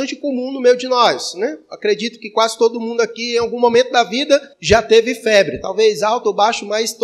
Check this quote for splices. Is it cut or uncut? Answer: cut